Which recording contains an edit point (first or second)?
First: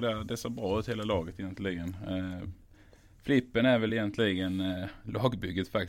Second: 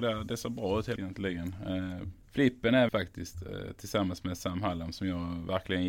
second